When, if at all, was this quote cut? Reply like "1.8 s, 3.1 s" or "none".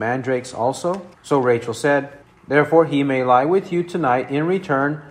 1.1 s, 2.2 s